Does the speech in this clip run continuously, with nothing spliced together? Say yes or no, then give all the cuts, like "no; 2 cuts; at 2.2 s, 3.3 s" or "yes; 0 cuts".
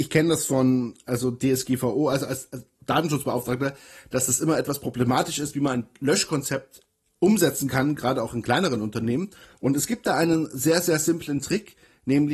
yes; 0 cuts